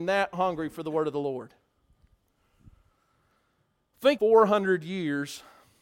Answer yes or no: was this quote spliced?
yes